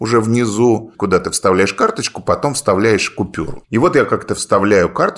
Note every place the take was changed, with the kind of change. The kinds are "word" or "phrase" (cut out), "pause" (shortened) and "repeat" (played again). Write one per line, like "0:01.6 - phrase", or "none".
none